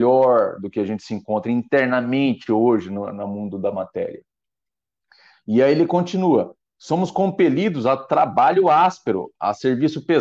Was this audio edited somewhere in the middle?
no; 0 cuts

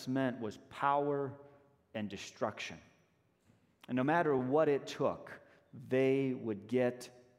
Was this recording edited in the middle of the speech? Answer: no; 0 cuts

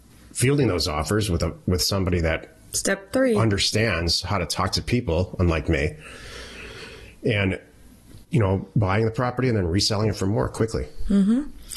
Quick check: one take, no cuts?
yes; 0 cuts

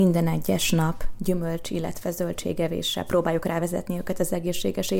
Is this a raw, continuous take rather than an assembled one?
yes; 0 cuts

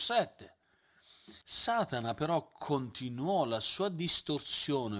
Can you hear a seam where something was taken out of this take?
yes; 1 cut; at 1.4 s

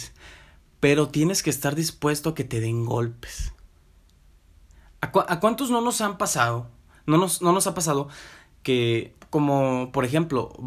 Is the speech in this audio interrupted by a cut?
yes; 1 cut; at 9.2 s

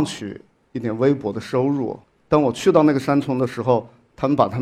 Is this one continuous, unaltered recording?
no; 1 cut; at 2.0 s

